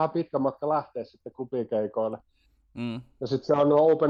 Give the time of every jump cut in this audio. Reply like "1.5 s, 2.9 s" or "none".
none